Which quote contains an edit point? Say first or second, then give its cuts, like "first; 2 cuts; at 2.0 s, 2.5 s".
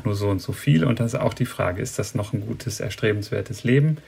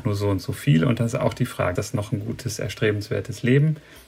second; 1 cut; at 1.8 s